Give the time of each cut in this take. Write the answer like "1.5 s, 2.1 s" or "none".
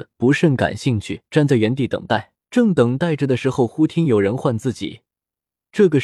1.3 s, 2.4 s